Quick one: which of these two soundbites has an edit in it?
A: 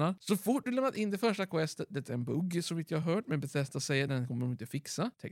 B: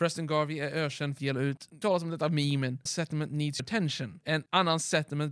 B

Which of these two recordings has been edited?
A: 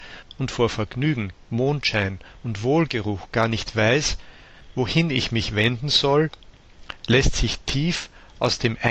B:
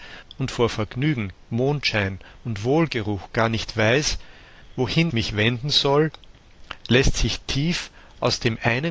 B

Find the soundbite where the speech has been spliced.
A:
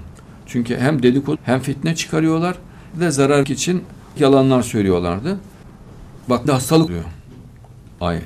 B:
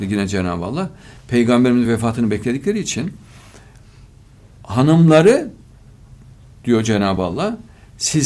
A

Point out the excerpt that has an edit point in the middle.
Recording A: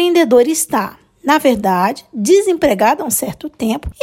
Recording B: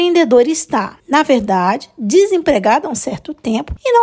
B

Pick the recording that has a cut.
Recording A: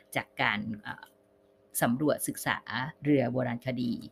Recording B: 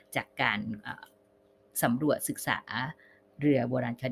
A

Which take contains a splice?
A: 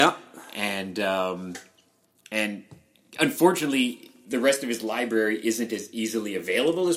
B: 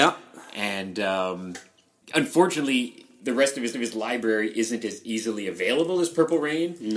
B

